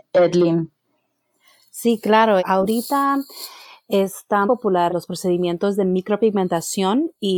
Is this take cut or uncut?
cut